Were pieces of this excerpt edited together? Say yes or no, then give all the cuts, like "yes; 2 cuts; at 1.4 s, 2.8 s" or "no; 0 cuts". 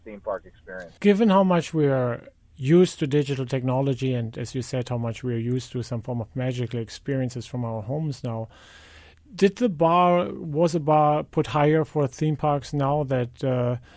yes; 1 cut; at 1.0 s